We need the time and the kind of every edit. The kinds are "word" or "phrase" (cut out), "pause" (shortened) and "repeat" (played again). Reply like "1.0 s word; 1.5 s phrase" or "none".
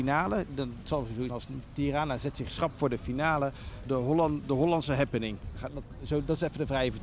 1.3 s word; 3.9 s word